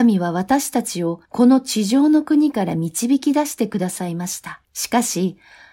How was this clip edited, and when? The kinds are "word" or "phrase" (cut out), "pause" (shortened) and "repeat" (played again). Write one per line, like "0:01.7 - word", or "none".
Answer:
0:01.3 - pause
0:04.6 - pause